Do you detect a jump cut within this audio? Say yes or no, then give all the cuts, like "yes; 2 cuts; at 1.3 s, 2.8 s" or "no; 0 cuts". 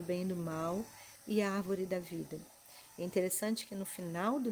no; 0 cuts